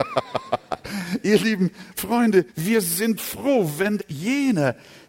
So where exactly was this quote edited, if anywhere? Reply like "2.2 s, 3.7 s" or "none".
2.5 s, 3.2 s, 4.0 s